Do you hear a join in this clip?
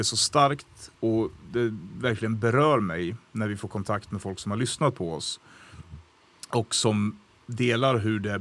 yes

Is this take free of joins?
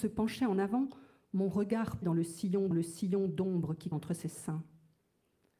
no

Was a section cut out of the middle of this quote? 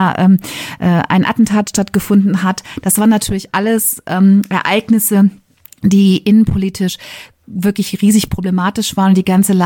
no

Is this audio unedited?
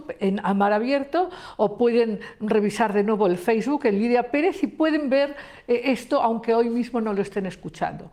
yes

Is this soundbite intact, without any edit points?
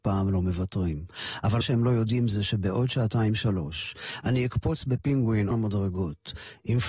no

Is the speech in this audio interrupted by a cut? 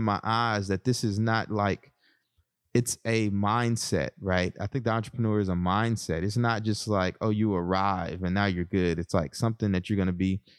no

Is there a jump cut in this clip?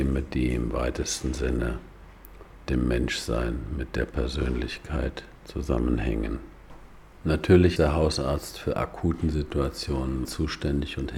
yes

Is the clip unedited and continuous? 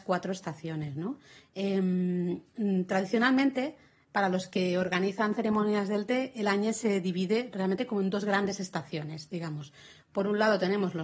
yes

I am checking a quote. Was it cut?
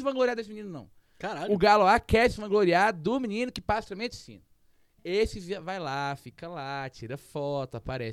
no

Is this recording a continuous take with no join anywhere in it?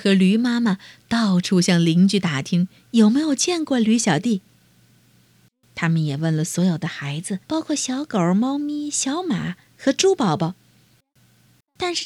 no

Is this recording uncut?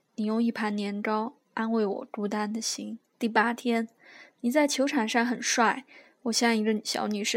no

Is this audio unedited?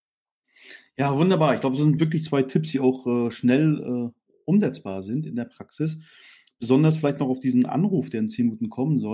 yes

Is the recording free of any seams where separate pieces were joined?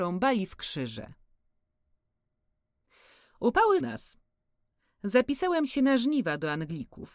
no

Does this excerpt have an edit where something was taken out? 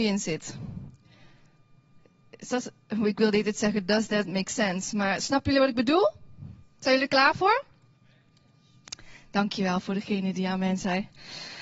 no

